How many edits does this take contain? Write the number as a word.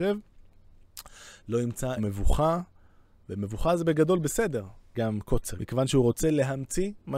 three